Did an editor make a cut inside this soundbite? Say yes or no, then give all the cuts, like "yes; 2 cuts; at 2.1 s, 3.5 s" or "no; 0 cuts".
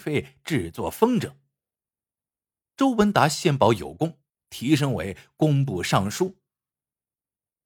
no; 0 cuts